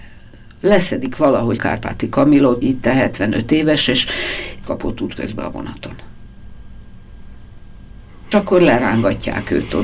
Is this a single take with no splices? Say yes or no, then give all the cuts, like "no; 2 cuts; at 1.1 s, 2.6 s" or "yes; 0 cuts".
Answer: no; 4 cuts; at 1.6 s, 2.6 s, 4.6 s, 8.3 s